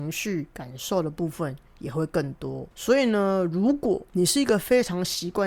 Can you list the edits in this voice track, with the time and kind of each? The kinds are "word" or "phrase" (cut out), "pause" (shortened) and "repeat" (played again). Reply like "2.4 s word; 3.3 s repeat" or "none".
2.7 s pause

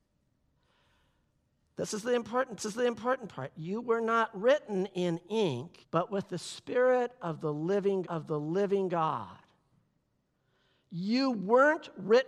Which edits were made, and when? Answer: 2.6 s repeat; 5.8 s pause; 8.0 s repeat

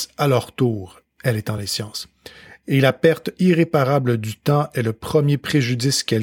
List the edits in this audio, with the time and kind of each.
none

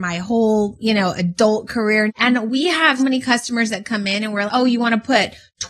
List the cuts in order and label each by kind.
2.1 s word; 3.0 s word; 4.5 s word

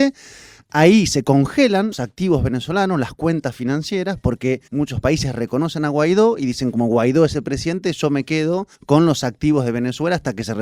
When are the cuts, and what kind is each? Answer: 1.9 s word; 4.7 s pause; 8.7 s pause

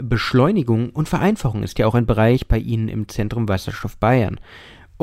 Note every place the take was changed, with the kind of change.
none

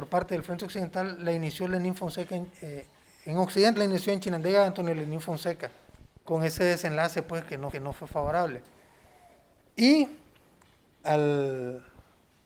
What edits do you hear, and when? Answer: 3.8 s word; 5.9 s pause; 7.7 s repeat; 11.0 s word

